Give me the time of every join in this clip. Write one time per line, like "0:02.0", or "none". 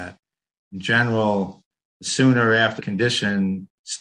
0:02.8